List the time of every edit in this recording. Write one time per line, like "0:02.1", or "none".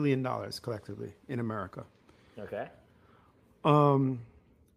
none